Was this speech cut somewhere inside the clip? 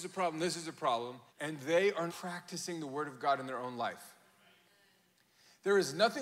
yes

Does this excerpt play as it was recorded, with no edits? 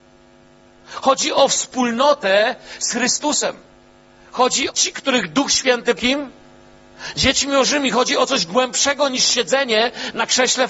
no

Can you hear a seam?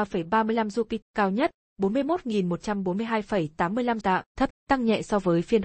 yes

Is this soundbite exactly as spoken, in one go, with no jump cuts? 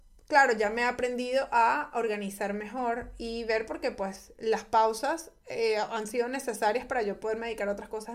yes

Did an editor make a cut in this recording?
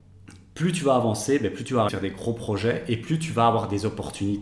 yes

